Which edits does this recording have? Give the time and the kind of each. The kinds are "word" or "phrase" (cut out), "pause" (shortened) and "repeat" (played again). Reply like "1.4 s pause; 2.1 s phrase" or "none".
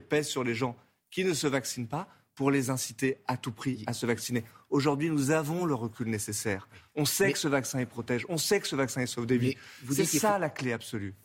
none